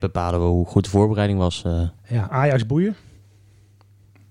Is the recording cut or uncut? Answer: cut